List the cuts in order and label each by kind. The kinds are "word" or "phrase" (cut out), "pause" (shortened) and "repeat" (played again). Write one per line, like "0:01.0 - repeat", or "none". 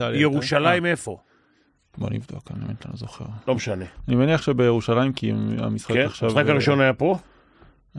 none